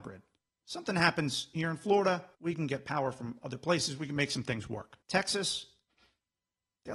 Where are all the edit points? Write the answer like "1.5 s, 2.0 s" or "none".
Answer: 2.3 s, 5.0 s